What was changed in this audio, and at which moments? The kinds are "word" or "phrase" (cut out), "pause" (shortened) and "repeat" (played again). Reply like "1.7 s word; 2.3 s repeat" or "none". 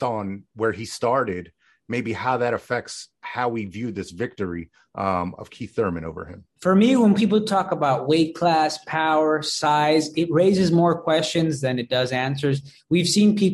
6.5 s pause